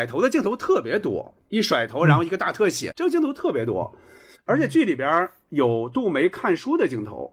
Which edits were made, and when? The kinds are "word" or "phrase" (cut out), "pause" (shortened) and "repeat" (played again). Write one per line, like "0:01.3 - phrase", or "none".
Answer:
0:02.9 - word

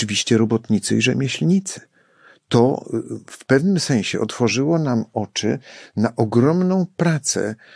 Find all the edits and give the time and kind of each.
none

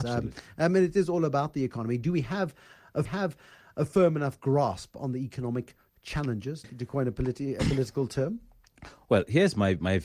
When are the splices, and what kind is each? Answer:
0:03.1 - repeat
0:06.6 - word

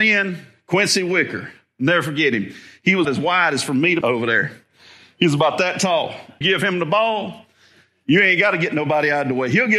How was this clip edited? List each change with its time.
0:03.0 - word
0:04.0 - word
0:06.4 - word

